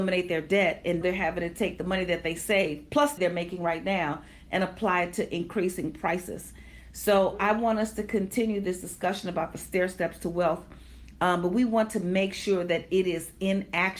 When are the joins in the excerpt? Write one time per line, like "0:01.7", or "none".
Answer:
0:01.0
0:03.2